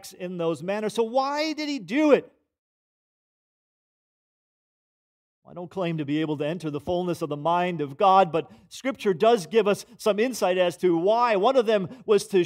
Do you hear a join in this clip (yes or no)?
no